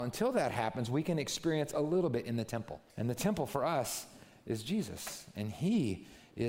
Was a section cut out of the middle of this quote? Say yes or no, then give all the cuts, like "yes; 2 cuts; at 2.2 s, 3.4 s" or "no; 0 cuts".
yes; 1 cut; at 2.9 s